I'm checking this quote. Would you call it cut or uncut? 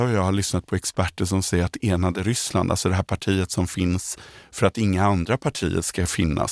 uncut